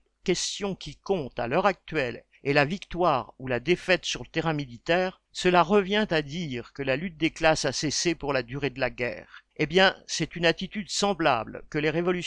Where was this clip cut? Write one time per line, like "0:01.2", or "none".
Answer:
0:02.4
0:05.3
0:09.5

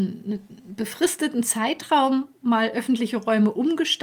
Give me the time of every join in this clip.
none

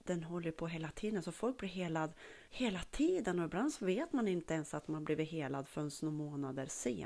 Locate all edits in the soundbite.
0:02.5

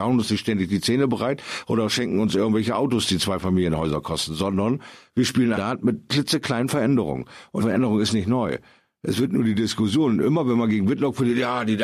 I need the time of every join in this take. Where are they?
0:05.5
0:07.6

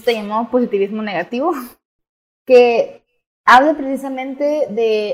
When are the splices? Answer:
none

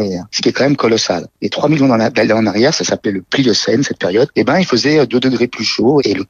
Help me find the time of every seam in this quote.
none

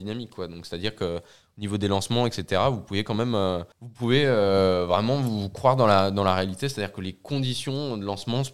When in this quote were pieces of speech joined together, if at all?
0:03.7

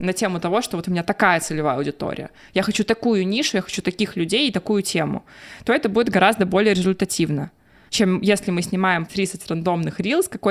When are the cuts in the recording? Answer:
0:07.9
0:09.1

